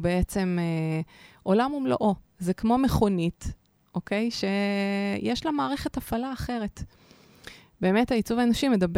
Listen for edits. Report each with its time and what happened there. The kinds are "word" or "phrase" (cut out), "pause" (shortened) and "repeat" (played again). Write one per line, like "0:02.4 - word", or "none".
none